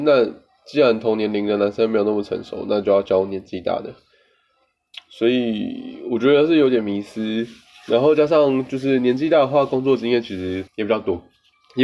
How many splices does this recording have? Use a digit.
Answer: 1